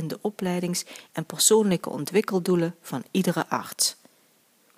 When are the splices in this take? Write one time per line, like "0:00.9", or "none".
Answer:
none